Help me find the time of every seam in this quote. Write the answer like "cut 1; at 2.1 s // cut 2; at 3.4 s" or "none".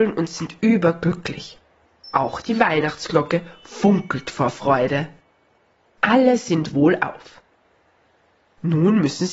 none